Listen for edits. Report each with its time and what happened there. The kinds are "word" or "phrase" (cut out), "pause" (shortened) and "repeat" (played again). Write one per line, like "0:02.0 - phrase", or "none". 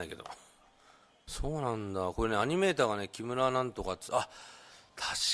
none